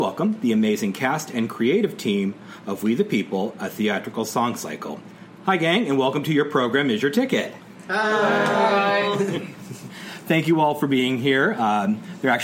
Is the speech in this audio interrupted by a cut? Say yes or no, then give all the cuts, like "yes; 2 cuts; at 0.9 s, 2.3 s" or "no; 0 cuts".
no; 0 cuts